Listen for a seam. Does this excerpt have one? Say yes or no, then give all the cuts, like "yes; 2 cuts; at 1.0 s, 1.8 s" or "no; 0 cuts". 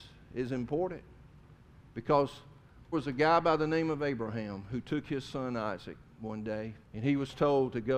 yes; 2 cuts; at 2.9 s, 6.8 s